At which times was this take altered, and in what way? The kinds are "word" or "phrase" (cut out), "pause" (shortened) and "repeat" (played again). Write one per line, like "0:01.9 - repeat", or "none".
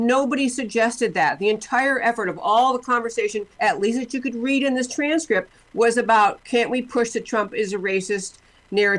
0:03.5 - pause